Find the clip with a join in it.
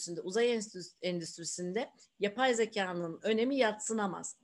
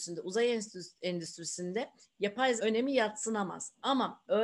second; 1 cut; at 2.6 s

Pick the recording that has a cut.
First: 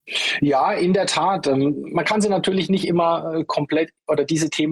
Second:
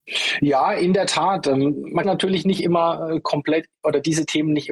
second; 1 cut; at 2.0 s

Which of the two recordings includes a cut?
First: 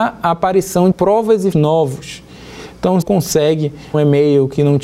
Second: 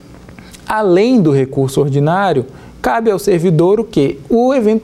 first; 4 cuts; at 0.9 s, 1.5 s, 3.0 s, 3.9 s

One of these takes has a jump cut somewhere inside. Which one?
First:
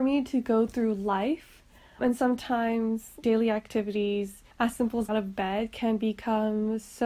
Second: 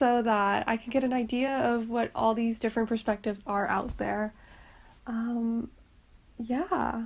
first; 4 cuts; at 2.0 s, 3.2 s, 4.5 s, 5.1 s

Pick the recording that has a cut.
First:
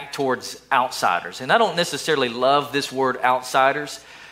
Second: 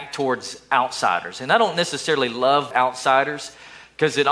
second; 1 cut; at 2.7 s

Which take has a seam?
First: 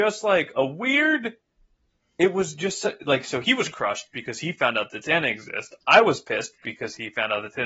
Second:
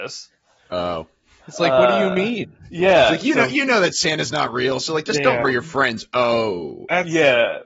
second; 1 cut; at 5.4 s

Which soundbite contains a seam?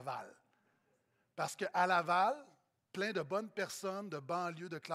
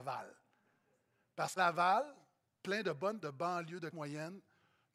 second; 3 cuts; at 1.6 s, 3.2 s, 3.9 s

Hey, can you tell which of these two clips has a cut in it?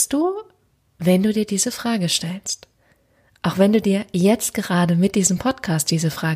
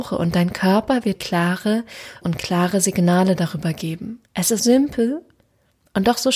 second; 4 cuts; at 1.2 s, 2.2 s, 4.3 s, 4.6 s

